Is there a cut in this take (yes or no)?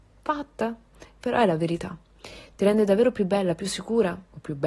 no